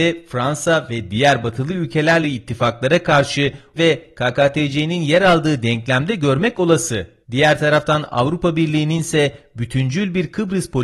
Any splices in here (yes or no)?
yes